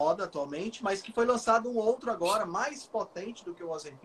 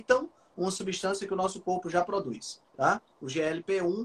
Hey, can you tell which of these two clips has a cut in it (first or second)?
second